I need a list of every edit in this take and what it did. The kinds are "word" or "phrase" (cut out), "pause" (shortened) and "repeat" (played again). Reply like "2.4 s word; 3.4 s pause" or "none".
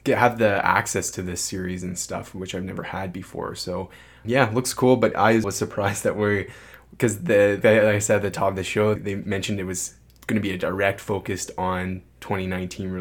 4.2 s word; 5.1 s word; 5.4 s word; 7.6 s word; 9.0 s word; 10.1 s pause